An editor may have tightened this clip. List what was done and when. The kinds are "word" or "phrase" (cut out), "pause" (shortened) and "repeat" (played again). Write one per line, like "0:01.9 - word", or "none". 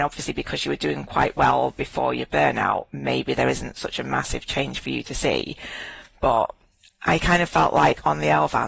none